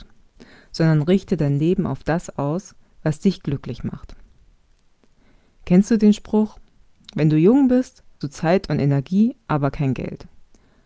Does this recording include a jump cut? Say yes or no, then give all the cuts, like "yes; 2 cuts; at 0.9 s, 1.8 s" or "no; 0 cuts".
yes; 1 cut; at 8.2 s